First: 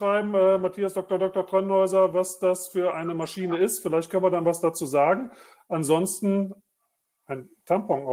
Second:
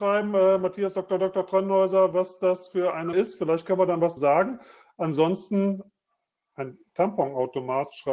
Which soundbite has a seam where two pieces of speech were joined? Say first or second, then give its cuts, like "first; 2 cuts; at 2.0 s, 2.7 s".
second; 2 cuts; at 3.1 s, 4.2 s